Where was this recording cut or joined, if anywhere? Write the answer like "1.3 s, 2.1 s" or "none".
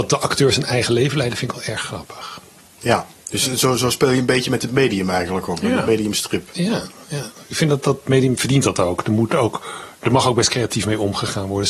none